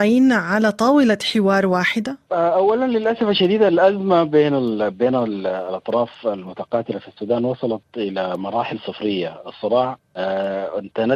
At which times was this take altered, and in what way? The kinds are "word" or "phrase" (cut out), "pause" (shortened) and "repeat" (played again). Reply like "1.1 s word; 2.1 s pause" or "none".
10.0 s pause